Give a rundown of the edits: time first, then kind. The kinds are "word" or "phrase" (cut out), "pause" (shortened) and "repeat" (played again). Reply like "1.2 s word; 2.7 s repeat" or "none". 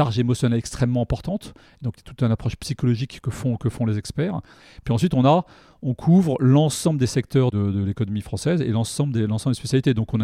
none